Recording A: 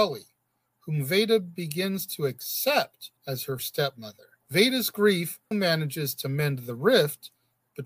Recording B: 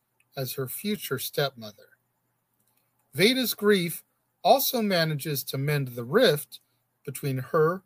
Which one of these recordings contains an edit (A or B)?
A